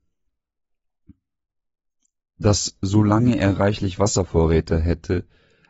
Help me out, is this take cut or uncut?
uncut